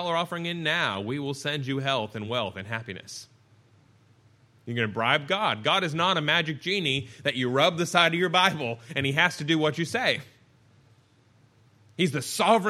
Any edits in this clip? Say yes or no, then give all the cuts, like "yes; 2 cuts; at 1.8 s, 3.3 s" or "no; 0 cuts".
no; 0 cuts